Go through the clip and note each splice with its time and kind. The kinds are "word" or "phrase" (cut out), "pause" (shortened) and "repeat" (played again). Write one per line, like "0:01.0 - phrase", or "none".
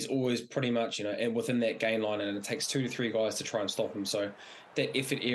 none